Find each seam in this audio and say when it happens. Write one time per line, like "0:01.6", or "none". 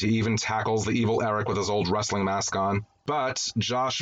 none